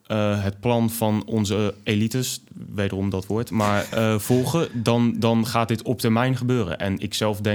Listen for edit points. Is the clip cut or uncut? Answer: uncut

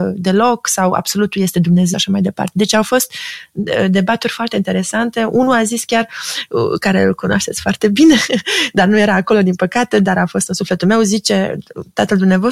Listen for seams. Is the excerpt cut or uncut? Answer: cut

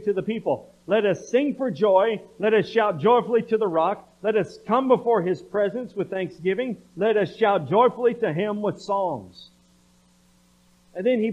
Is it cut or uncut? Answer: uncut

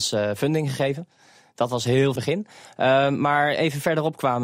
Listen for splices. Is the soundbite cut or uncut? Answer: cut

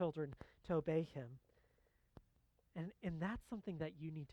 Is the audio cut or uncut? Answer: uncut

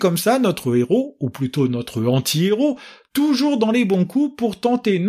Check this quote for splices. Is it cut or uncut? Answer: uncut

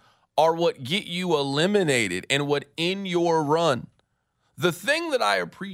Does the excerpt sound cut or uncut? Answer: uncut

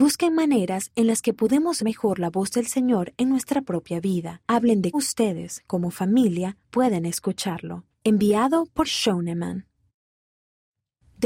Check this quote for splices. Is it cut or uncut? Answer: cut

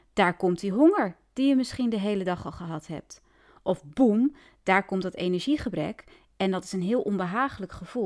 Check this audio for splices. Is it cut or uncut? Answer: uncut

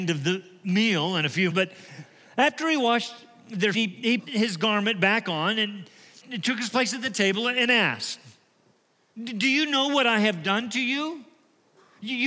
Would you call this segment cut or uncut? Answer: cut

